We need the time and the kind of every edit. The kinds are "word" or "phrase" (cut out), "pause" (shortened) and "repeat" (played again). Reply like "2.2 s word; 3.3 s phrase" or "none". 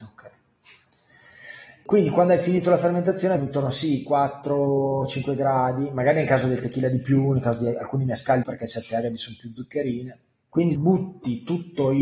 3.4 s word; 8.4 s phrase